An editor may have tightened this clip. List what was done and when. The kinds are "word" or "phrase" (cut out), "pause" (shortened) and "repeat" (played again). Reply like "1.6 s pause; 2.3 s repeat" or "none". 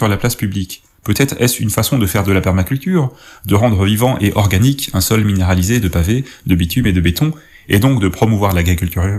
none